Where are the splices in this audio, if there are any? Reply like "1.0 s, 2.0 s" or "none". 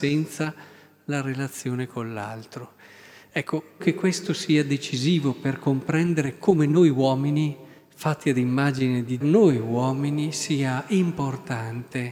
3.8 s, 7.8 s, 9.2 s